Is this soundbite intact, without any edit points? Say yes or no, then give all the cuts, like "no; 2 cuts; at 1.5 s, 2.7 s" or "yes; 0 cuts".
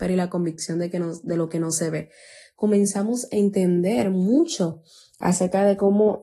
yes; 0 cuts